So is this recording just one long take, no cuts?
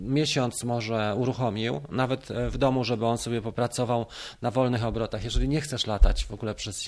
yes; 0 cuts

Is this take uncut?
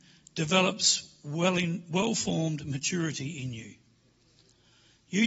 yes; 0 cuts

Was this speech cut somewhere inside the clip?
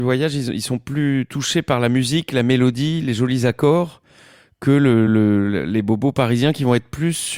no; 0 cuts

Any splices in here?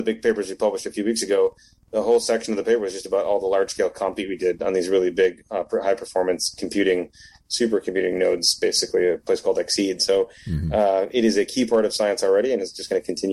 no; 0 cuts

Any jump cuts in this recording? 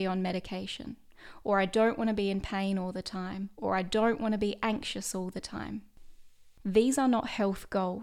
no; 0 cuts

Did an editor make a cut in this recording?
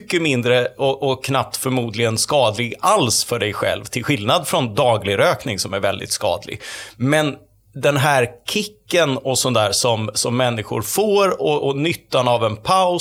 no; 0 cuts

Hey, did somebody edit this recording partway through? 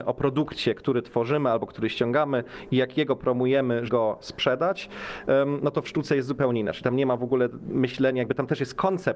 yes; 1 cut; at 3.9 s

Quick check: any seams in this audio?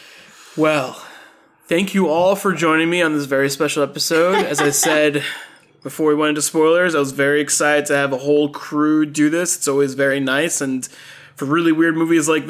no; 0 cuts

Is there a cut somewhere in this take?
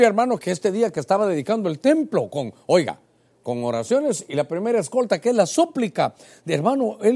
no; 0 cuts

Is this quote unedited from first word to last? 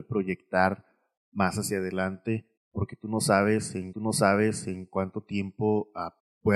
no; 1 cut; at 3.9 s

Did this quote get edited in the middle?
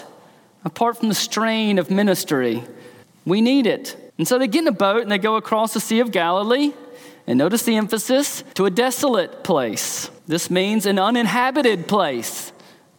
yes; 4 cuts; at 3.0 s, 4.1 s, 8.5 s, 10.2 s

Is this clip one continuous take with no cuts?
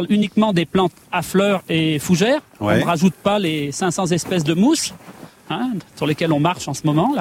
yes; 0 cuts

